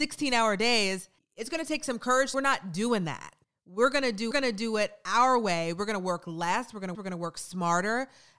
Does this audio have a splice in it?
yes; 5 cuts; at 1.2 s, 2.3 s, 3.4 s, 4.3 s, 6.9 s

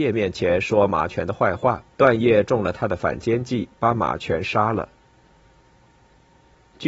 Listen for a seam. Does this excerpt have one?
yes; 1 cut; at 1.9 s

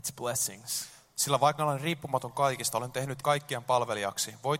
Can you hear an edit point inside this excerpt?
yes; 2 cuts; at 1.6 s, 3.2 s

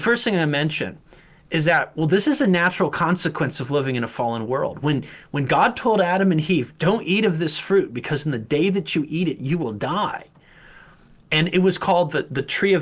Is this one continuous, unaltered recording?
yes; 0 cuts

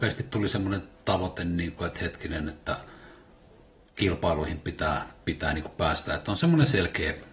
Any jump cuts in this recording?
no; 0 cuts

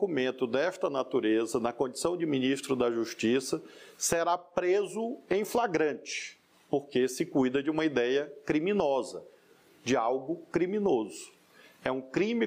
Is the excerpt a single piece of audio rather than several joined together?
no; 1 cut; at 6.5 s

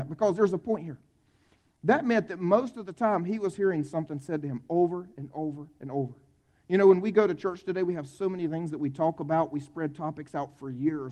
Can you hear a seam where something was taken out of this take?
no; 0 cuts

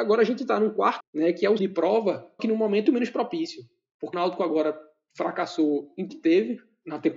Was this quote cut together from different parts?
yes; 6 cuts; at 1.0 s, 1.6 s, 2.4 s, 2.9 s, 4.1 s, 6.1 s

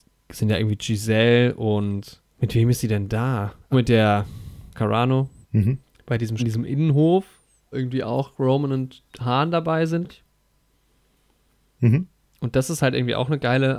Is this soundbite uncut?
no; 8 cuts; at 2.3 s, 3.7 s, 4.7 s, 5.4 s, 6.4 s, 7.7 s, 9.1 s, 10.1 s

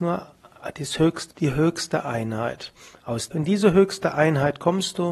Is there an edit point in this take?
yes; 2 cuts; at 1.3 s, 3.3 s

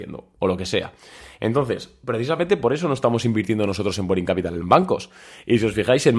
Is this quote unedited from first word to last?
yes; 0 cuts

